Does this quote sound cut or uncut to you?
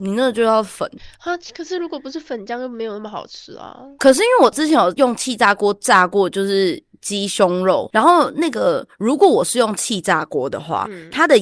uncut